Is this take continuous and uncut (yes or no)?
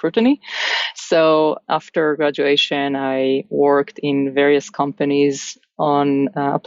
yes